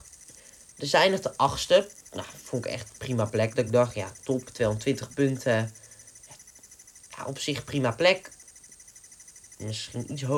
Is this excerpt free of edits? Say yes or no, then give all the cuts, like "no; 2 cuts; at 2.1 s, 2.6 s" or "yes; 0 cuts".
yes; 0 cuts